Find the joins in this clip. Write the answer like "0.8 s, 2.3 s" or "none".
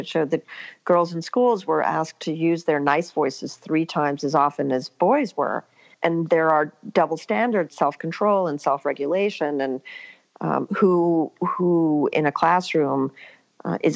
7.7 s